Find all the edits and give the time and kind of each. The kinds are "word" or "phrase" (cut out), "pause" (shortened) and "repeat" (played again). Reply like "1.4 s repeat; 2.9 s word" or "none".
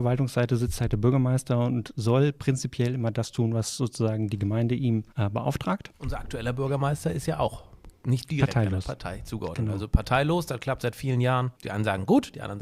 5.1 s pause; 5.9 s pause; 8.0 s pause; 11.6 s pause